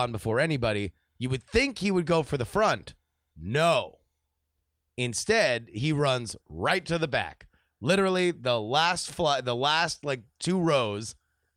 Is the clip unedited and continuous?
yes; 0 cuts

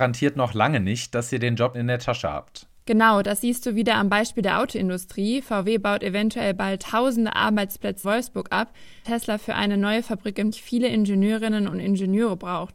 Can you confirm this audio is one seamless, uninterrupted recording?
no; 4 cuts; at 1.7 s, 8.0 s, 9.0 s, 10.5 s

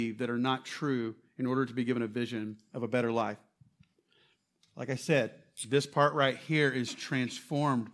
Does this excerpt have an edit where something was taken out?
no; 0 cuts

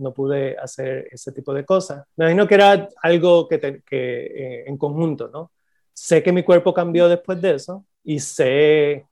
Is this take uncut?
no; 3 cuts; at 1.1 s, 2.1 s, 7.9 s

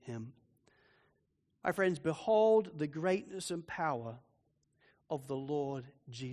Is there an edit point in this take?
no; 0 cuts

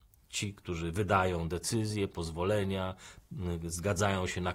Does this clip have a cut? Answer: no; 0 cuts

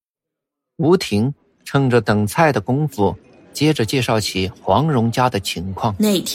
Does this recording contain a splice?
no; 0 cuts

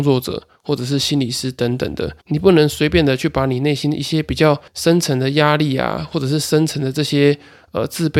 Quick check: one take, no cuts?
no; 2 cuts; at 2.2 s, 4.7 s

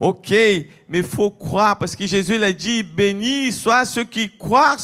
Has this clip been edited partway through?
no; 0 cuts

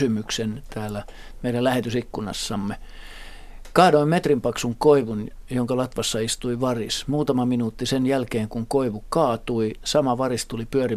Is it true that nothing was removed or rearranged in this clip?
yes; 0 cuts

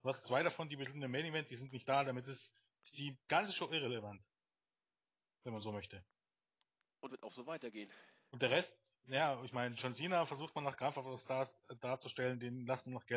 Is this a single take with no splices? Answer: no; 1 cut; at 7.1 s

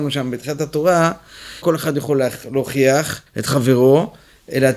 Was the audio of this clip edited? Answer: yes; 2 cuts; at 1.6 s, 3.3 s

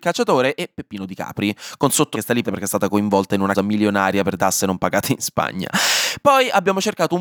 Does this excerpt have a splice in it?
yes; 4 cuts; at 2.1 s, 2.4 s, 3.5 s, 4.4 s

